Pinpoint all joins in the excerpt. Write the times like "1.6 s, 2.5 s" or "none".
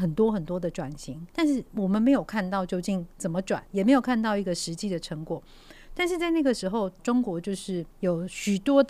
1.3 s, 3.7 s, 7.0 s, 7.9 s